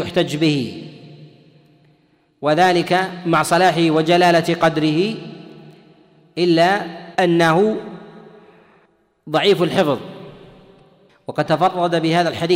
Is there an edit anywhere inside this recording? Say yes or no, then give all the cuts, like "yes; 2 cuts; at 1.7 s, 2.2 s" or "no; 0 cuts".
yes; 2 cuts; at 7.1 s, 11.5 s